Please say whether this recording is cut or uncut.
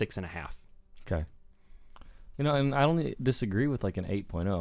uncut